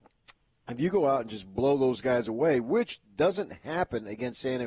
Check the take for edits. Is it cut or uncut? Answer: uncut